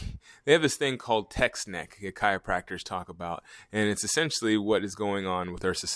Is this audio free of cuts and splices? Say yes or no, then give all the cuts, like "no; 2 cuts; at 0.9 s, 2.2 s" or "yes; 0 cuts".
yes; 0 cuts